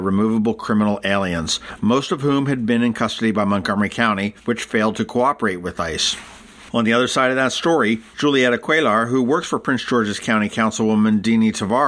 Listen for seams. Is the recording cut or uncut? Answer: cut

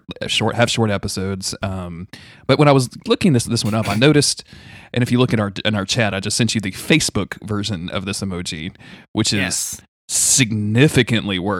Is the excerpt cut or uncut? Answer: uncut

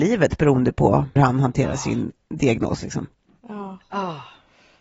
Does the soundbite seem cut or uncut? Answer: cut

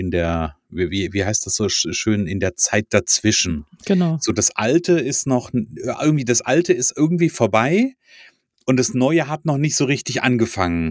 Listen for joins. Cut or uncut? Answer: uncut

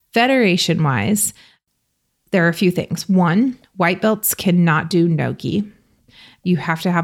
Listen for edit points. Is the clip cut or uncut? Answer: uncut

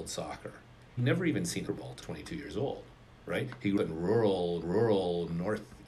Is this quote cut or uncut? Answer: cut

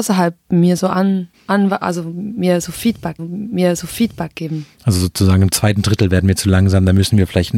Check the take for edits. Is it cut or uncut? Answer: cut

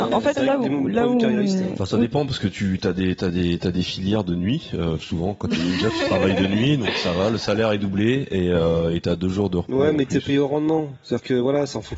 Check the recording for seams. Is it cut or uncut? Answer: uncut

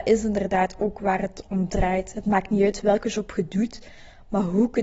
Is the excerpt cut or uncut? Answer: uncut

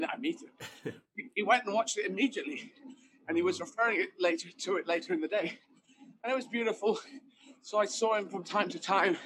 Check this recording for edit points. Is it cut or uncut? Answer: uncut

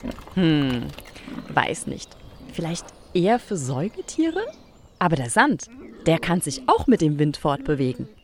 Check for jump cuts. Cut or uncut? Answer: uncut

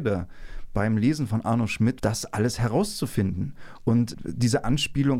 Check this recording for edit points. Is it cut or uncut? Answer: cut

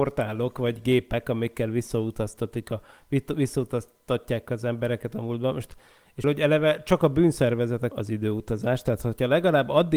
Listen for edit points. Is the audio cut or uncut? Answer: cut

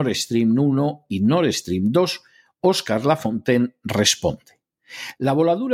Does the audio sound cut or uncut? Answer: uncut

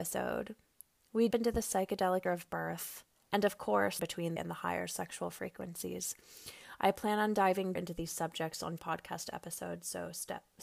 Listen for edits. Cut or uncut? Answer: cut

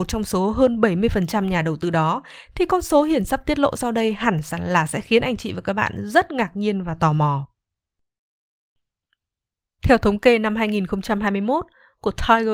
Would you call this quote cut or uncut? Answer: uncut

